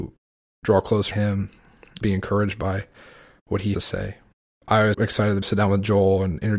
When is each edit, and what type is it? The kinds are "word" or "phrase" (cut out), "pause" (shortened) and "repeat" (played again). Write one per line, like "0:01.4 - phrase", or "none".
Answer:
0:01.1 - word
0:02.0 - word
0:03.7 - word
0:04.6 - word
0:04.9 - word
0:05.4 - word